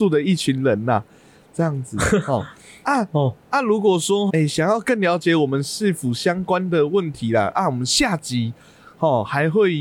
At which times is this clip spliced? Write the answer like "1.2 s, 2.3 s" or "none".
4.3 s